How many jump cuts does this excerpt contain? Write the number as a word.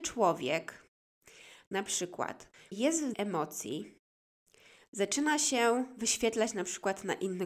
two